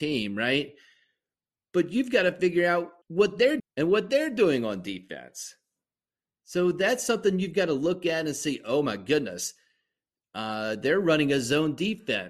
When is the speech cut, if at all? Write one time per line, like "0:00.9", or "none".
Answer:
0:03.0
0:03.6